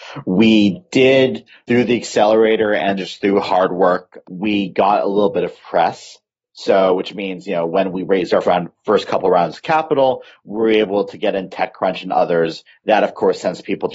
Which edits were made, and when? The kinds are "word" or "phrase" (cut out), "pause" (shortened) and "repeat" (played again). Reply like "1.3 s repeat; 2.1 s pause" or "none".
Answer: 1.7 s word; 3.0 s word; 4.2 s word; 8.4 s word